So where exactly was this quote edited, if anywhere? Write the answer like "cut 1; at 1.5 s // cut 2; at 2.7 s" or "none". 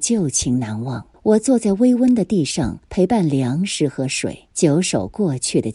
cut 1; at 1.1 s // cut 2; at 2.8 s // cut 3; at 4.5 s